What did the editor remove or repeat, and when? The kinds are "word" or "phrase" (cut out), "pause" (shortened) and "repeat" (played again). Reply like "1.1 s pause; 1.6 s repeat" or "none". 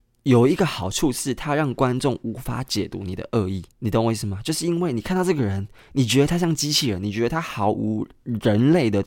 3.7 s pause

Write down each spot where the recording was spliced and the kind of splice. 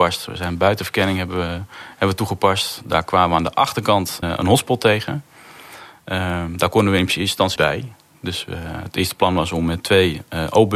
4.2 s word; 7.6 s word

